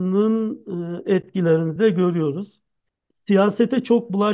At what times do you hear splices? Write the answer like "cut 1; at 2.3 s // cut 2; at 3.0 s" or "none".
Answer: none